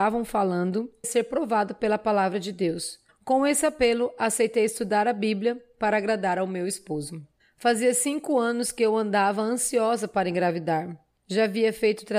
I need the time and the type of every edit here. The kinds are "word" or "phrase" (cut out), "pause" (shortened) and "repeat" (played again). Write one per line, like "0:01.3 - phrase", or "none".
0:01.0 - word